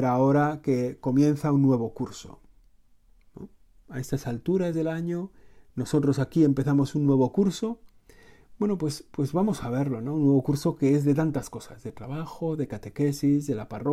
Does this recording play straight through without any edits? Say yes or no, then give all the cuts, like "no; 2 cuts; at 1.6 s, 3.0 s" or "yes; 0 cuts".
yes; 0 cuts